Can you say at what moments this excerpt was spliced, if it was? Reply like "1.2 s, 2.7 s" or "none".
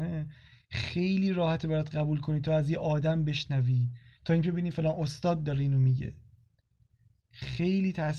none